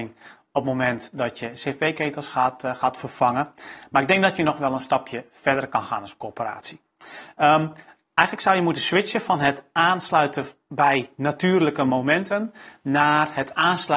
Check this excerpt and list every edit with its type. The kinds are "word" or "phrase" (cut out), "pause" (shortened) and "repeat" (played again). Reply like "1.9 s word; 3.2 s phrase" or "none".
none